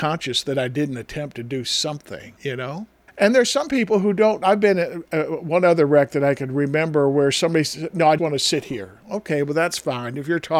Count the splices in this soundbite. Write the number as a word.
three